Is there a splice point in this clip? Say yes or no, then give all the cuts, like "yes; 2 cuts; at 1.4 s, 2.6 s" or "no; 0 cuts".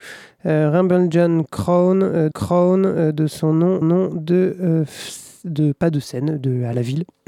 yes; 2 cuts; at 2.3 s, 3.8 s